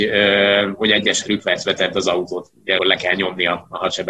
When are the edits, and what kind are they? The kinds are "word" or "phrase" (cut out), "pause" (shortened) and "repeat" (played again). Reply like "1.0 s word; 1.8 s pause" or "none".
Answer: 1.2 s word; 2.8 s word